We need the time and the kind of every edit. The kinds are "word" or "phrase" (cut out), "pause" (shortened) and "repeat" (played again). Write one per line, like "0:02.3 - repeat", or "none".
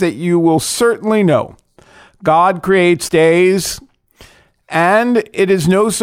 0:03.1 - phrase